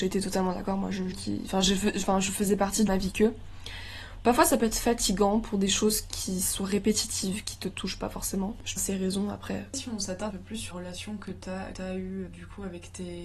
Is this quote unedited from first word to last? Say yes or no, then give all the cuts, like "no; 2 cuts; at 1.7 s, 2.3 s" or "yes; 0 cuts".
no; 7 cuts; at 1.1 s, 2.9 s, 8.8 s, 10.3 s, 10.7 s, 11.7 s, 12.3 s